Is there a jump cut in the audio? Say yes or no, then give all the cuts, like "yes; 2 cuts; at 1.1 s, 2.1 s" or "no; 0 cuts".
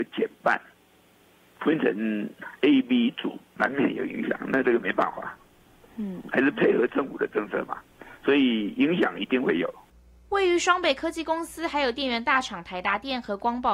no; 0 cuts